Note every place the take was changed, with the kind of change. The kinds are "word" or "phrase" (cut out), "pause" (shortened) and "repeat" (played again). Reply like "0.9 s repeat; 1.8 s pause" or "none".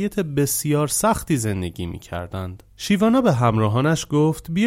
2.7 s pause

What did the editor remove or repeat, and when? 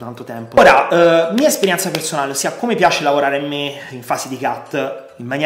none

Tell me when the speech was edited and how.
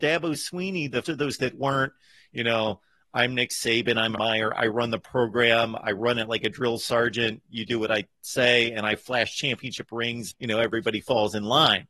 1.0 s word; 1.4 s word; 4.2 s word; 10.3 s word

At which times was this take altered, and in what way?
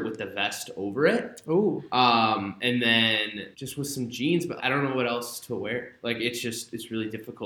3.5 s pause; 4.6 s word

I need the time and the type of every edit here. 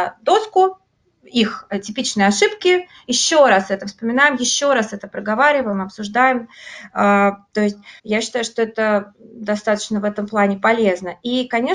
8.0 s pause

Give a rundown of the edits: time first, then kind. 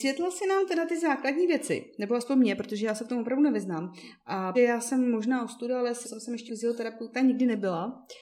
4.5 s word; 6.0 s word; 6.5 s word

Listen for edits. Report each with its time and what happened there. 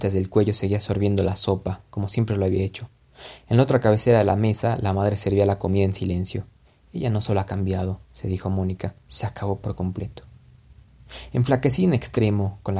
6.6 s pause; 8.0 s pause; 9.0 s pause

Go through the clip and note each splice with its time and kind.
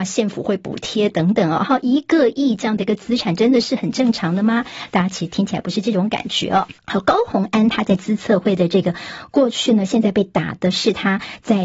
6.8 s pause

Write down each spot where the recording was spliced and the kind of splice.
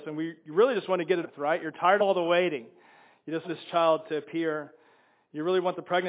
1.2 s word; 2.0 s word; 3.4 s word

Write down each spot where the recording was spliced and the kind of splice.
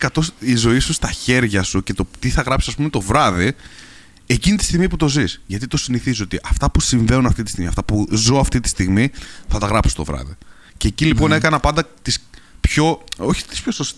none

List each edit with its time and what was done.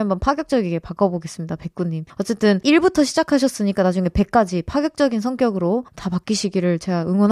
2.1 s pause; 5.9 s pause

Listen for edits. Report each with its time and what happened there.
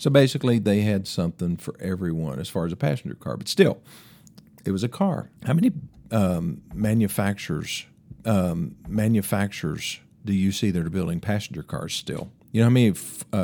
5.4 s pause; 8.1 s repeat; 12.4 s pause

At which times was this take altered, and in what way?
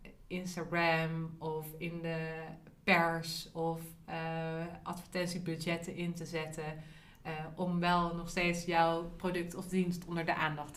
none

